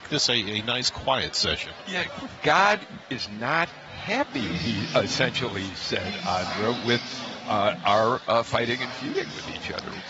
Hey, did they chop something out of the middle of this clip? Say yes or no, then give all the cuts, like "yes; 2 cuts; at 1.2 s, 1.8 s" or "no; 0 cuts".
no; 0 cuts